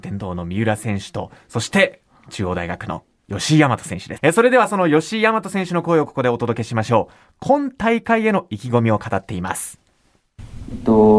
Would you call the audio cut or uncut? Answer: cut